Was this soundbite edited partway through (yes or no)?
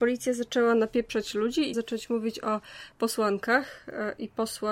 yes